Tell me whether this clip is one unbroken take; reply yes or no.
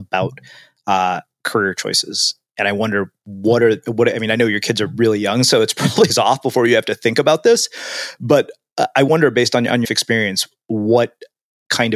no